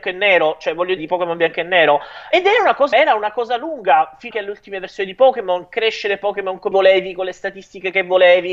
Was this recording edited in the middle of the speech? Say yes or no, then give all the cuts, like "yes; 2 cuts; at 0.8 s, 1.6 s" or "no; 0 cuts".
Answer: yes; 5 cuts; at 1.0 s, 2.3 s, 2.9 s, 4.3 s, 6.7 s